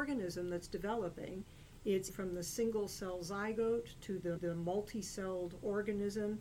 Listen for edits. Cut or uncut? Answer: cut